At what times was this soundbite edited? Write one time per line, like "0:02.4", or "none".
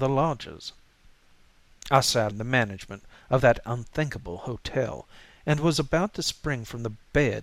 0:02.3